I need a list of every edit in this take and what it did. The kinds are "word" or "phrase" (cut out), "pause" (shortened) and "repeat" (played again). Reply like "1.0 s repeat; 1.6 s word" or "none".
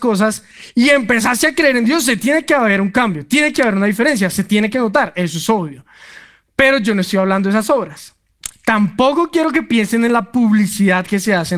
none